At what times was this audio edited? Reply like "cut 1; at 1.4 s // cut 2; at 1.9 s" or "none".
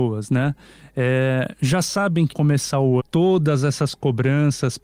cut 1; at 2.3 s // cut 2; at 3.0 s